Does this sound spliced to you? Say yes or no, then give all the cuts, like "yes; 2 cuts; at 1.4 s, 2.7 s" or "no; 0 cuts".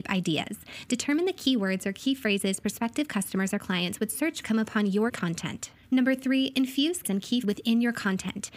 yes; 4 cuts; at 4.4 s, 5.1 s, 7.0 s, 7.4 s